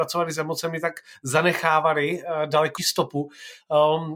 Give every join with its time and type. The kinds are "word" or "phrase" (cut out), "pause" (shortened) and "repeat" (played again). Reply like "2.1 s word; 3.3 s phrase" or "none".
2.8 s word